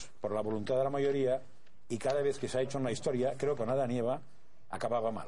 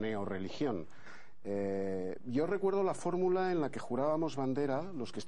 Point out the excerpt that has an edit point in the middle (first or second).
first